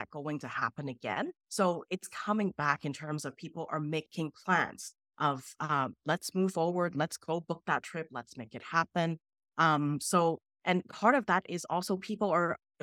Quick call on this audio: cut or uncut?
cut